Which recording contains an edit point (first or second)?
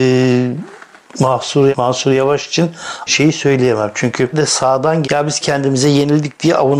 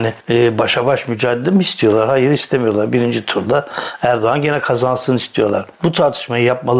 first